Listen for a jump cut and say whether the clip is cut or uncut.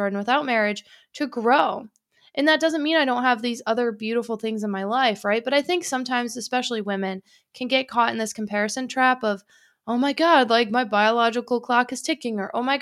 uncut